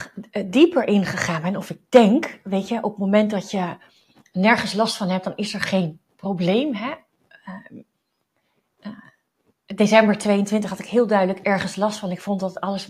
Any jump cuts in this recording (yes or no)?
no